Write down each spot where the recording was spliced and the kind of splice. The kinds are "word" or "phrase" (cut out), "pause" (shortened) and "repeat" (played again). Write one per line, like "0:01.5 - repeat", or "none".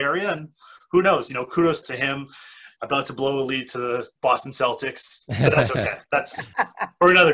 0:01.8 - word
0:04.2 - pause